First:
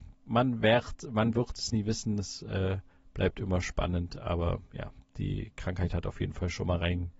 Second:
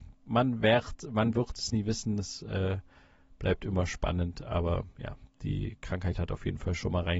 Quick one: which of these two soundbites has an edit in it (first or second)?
first